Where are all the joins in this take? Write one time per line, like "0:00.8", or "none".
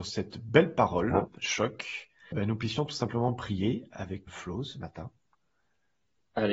0:02.3
0:04.3